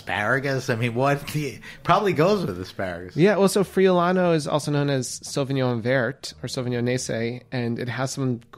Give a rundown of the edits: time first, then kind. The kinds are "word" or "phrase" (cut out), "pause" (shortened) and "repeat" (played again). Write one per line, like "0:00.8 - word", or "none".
none